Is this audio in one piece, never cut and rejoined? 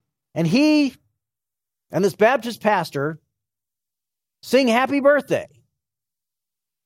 yes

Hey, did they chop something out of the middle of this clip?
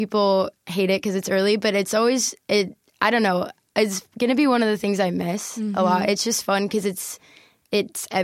no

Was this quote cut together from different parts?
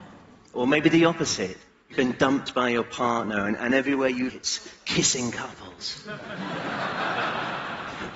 yes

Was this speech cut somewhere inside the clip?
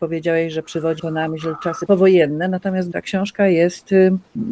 yes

